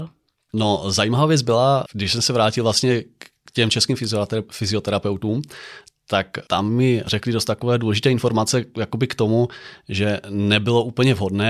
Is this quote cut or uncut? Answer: uncut